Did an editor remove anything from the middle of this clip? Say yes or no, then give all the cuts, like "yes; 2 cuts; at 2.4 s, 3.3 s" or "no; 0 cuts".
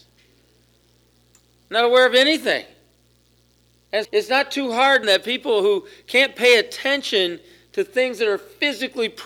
yes; 2 cuts; at 4.0 s, 5.0 s